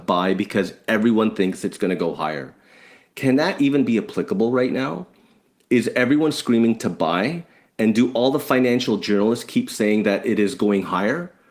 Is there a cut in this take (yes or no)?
no